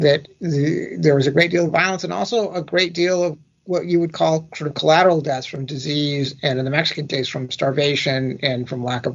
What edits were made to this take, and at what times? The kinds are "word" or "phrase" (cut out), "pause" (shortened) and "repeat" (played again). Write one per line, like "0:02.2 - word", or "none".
none